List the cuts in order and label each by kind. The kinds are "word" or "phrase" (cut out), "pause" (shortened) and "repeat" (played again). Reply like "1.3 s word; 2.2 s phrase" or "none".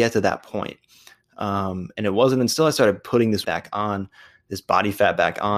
3.4 s word